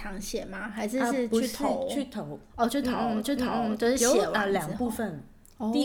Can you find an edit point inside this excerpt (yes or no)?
yes